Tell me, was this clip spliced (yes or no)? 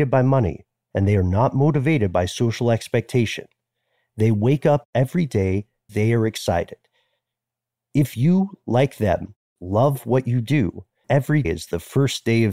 yes